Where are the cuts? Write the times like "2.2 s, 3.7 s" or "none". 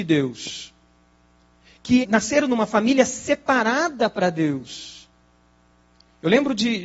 2.0 s